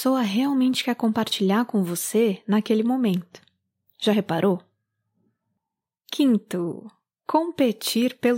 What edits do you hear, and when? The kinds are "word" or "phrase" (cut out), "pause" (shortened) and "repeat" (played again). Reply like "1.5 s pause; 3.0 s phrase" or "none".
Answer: none

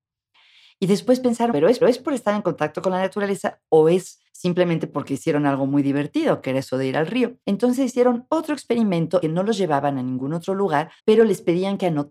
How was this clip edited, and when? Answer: 1.5 s word; 1.8 s repeat; 4.3 s pause; 7.4 s pause; 9.2 s phrase; 11.0 s pause

